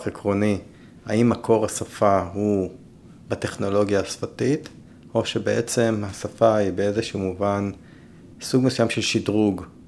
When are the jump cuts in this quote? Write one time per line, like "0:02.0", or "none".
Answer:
none